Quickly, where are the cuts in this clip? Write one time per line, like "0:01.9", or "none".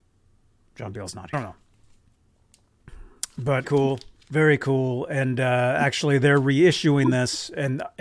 0:01.3
0:03.6
0:04.2